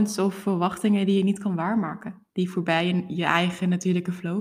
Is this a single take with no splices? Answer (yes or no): no